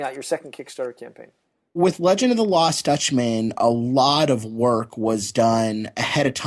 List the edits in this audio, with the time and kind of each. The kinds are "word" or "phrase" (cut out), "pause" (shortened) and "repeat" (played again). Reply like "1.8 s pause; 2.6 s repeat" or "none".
none